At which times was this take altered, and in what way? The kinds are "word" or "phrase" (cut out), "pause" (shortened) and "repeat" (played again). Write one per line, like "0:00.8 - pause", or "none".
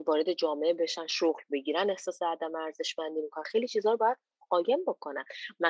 none